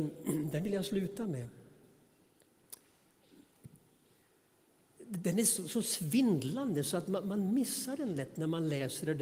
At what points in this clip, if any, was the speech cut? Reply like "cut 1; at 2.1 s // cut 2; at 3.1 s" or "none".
none